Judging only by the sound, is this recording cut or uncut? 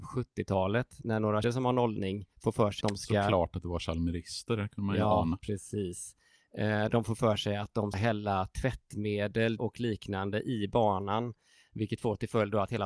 cut